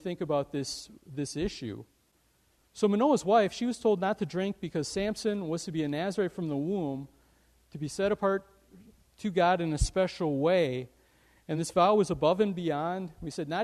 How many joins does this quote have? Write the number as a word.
zero